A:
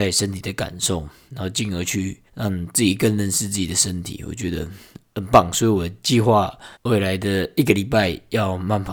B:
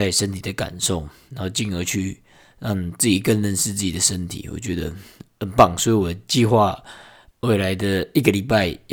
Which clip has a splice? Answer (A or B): A